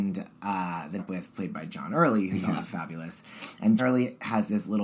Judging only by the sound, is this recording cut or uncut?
cut